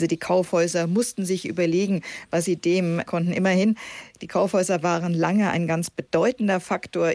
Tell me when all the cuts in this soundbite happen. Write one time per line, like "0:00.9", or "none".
0:03.1